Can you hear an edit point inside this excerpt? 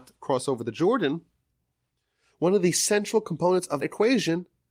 yes; 1 cut; at 3.8 s

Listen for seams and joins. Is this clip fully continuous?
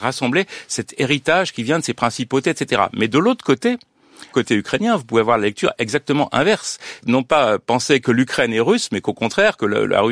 no; 1 cut; at 4.3 s

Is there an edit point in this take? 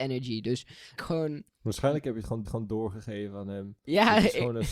yes; 2 cuts; at 1.0 s, 2.4 s

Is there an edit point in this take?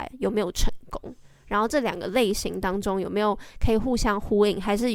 no; 0 cuts

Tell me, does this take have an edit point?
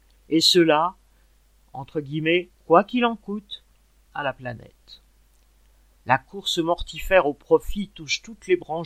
yes; 1 cut; at 2.5 s

